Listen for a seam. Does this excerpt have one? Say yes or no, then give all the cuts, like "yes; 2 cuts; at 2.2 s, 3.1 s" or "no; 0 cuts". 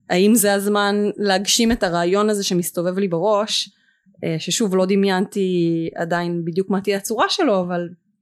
no; 0 cuts